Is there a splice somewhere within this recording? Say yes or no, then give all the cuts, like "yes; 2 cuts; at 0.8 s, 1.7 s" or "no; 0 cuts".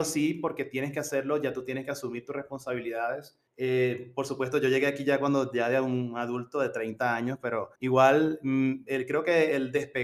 yes; 2 cuts; at 3.5 s, 7.8 s